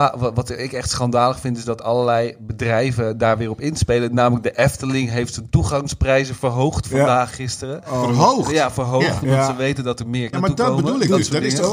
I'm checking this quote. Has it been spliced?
yes; 2 cuts; at 7.3 s, 10.3 s

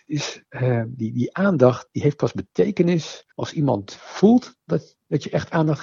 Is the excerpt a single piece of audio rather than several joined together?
no; 1 cut; at 3.3 s

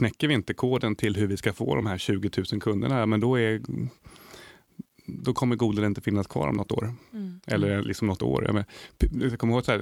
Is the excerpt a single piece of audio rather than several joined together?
yes; 0 cuts

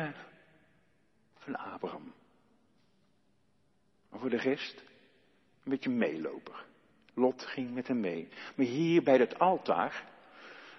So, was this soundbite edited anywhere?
no; 0 cuts

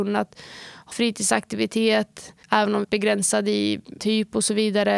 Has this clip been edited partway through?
yes; 4 cuts; at 0.9 s, 2.4 s, 2.8 s, 4.0 s

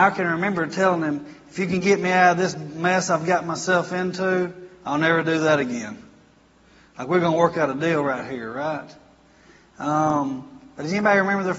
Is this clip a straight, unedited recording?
yes; 0 cuts

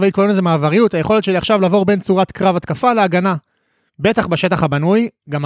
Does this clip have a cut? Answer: no; 0 cuts

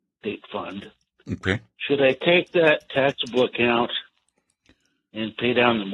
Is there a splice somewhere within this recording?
yes; 1 cut; at 1.1 s

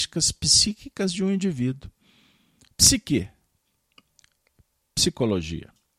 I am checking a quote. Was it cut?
no; 0 cuts

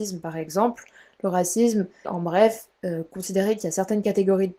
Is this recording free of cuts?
no; 2 cuts; at 2.0 s, 2.8 s

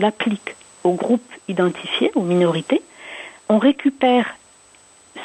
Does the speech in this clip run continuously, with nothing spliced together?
no; 1 cut; at 3.4 s

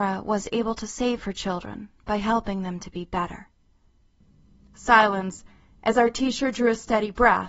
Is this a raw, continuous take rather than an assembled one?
yes; 0 cuts

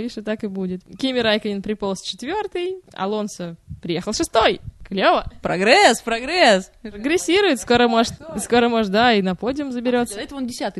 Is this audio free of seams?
yes; 0 cuts

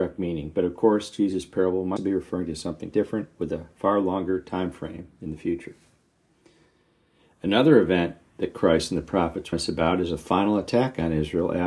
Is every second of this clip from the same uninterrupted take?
no; 3 cuts; at 2.0 s, 2.9 s, 9.5 s

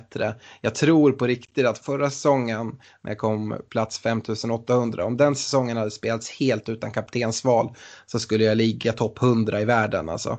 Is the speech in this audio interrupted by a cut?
yes; 1 cut; at 1.8 s

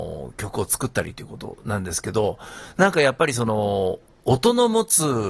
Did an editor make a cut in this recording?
no; 0 cuts

